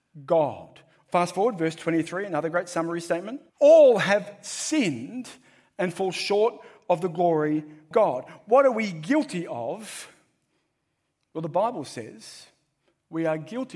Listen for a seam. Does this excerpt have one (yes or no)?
yes